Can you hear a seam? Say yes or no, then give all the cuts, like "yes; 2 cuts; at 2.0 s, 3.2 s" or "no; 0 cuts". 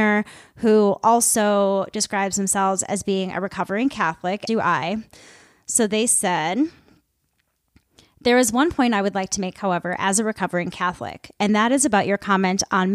yes; 1 cut; at 4.5 s